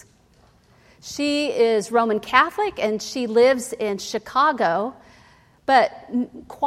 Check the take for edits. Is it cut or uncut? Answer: uncut